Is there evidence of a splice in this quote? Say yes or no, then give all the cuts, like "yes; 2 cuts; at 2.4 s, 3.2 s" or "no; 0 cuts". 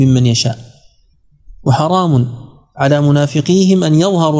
no; 0 cuts